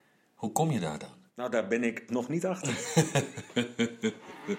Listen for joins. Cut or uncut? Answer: cut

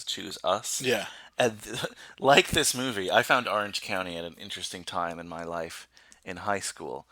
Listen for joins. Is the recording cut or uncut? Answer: uncut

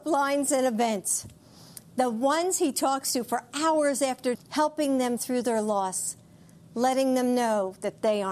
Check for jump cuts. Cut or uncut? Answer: cut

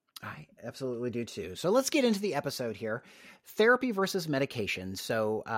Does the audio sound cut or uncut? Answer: uncut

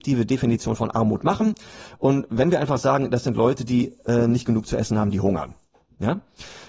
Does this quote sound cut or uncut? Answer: uncut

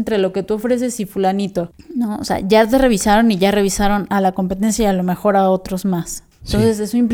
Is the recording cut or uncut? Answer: uncut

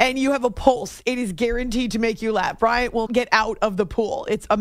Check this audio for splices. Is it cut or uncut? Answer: cut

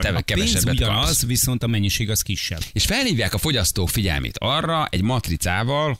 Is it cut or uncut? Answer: uncut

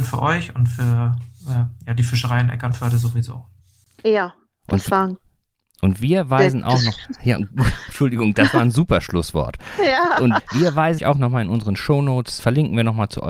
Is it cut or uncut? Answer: cut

